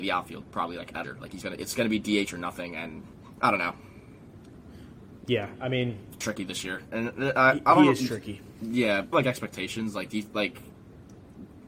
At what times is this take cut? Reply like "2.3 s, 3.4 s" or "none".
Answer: 1.0 s, 1.4 s, 3.4 s, 6.2 s, 9.1 s